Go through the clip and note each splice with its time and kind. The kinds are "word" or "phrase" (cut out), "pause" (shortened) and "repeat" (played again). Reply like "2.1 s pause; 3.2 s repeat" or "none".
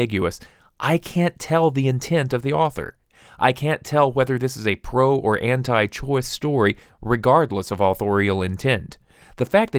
none